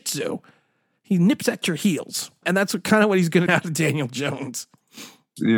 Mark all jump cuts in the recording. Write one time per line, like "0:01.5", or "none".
0:02.4
0:03.5